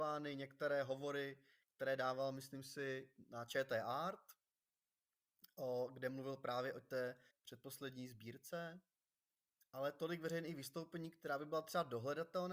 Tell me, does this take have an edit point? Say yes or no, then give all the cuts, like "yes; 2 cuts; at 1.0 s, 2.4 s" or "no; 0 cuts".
yes; 1 cut; at 7.3 s